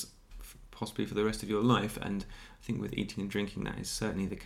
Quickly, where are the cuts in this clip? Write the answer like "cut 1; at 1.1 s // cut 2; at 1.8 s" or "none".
none